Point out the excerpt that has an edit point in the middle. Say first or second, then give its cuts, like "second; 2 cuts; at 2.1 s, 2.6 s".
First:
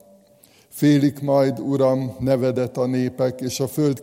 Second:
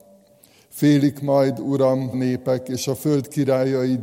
second; 1 cut; at 2.1 s